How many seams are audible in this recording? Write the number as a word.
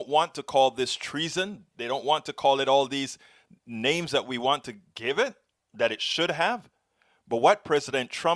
zero